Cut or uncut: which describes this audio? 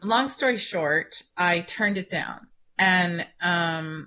uncut